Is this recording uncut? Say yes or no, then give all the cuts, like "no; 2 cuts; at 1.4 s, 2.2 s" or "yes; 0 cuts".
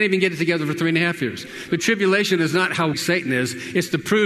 no; 1 cut; at 2.9 s